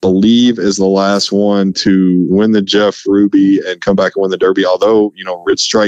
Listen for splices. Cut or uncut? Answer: uncut